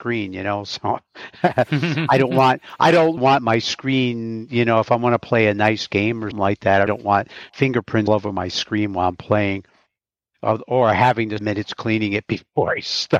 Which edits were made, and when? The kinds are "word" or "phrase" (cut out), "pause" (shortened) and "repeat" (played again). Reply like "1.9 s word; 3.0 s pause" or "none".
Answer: 3.2 s word; 6.3 s word; 6.9 s word; 8.1 s word; 11.4 s phrase

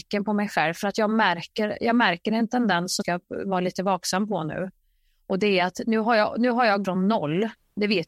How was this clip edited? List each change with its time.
3.0 s word; 6.8 s word

